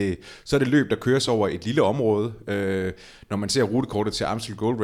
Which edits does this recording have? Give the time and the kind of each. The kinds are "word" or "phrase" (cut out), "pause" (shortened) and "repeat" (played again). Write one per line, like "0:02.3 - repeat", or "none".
none